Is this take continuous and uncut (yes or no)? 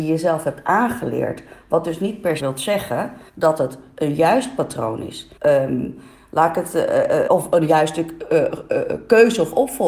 no